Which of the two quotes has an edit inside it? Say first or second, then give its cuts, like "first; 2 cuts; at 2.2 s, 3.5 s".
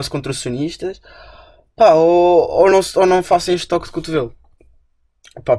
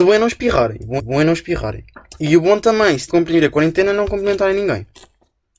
second; 2 cuts; at 1.0 s, 3.1 s